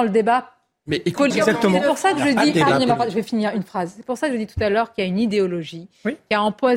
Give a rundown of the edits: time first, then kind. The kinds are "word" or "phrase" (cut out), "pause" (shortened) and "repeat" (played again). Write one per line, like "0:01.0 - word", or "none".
0:01.3 - word

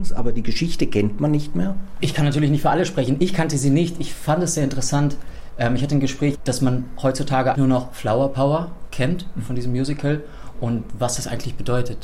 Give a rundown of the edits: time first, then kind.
0:07.5 - word

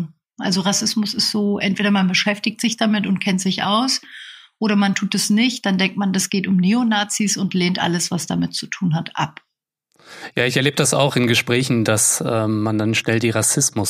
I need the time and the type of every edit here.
none

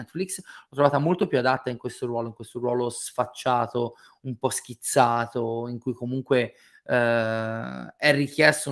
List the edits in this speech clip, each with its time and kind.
none

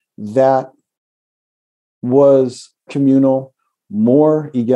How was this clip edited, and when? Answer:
0:02.9 - word

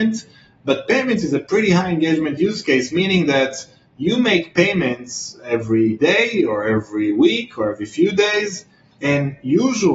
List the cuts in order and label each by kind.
none

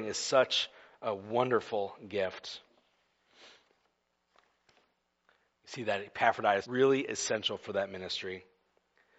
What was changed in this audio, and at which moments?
0:06.6 - word

